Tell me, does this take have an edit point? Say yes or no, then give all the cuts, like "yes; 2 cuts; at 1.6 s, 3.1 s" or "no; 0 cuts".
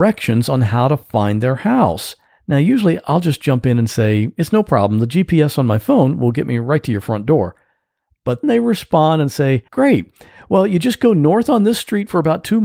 yes; 3 cuts; at 2.3 s, 8.4 s, 9.7 s